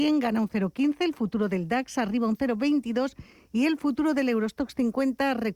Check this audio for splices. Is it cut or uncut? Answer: uncut